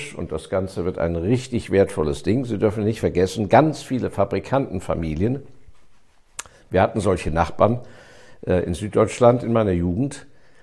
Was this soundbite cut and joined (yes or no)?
no